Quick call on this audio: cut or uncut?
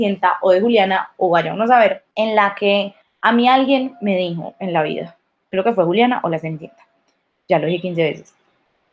cut